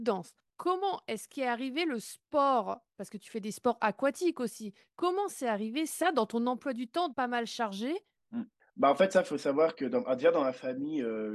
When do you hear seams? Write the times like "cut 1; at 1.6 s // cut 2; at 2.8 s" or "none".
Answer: cut 1; at 7.1 s